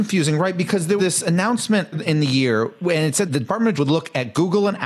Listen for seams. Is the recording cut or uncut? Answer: cut